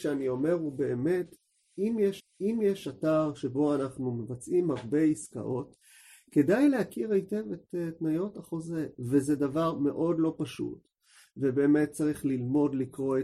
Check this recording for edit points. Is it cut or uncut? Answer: cut